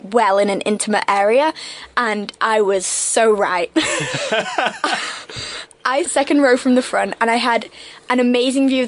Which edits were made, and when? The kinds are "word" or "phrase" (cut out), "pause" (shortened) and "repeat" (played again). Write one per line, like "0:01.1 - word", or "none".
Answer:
0:06.0 - word